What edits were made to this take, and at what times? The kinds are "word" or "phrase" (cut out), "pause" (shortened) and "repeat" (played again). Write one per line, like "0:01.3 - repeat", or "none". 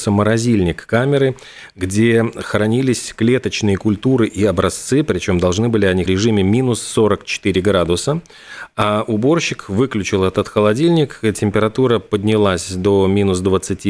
0:06.1 - phrase